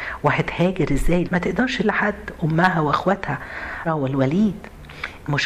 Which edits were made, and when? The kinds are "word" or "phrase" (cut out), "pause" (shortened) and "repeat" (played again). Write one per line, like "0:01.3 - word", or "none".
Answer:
0:01.2 - word
0:01.8 - word
0:03.8 - word

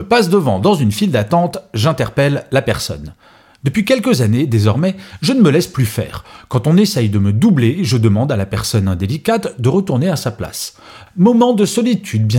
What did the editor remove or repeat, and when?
none

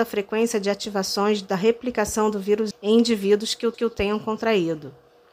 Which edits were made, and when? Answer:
0:02.7 - word
0:03.7 - repeat

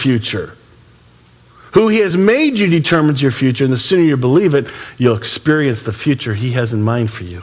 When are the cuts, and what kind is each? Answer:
none

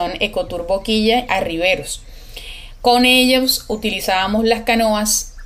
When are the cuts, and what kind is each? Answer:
0:01.3 - word

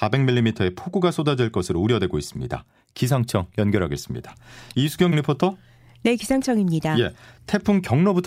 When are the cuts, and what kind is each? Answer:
0:05.1 - word

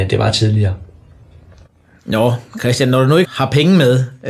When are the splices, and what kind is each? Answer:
0:03.2 - word

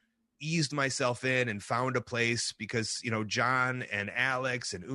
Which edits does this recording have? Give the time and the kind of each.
none

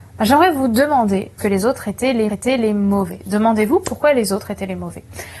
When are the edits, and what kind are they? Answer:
0:01.4 - phrase
0:02.3 - repeat

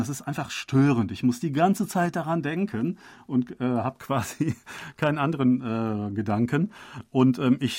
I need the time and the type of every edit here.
none

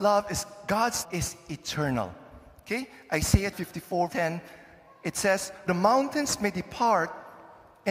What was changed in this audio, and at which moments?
0:01.0 - word
0:03.5 - word
0:04.1 - word
0:05.7 - word

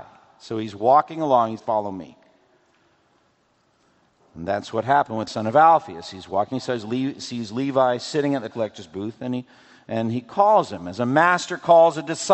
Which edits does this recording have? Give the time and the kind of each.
0:01.6 - word
0:05.3 - word
0:06.5 - word
0:08.5 - word

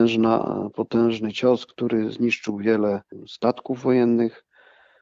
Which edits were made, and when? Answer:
none

